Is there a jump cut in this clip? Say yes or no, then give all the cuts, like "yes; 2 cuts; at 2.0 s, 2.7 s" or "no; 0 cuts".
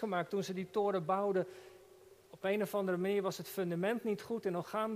no; 0 cuts